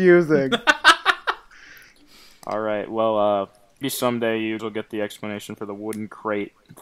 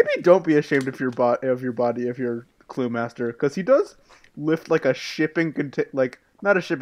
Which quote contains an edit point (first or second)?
first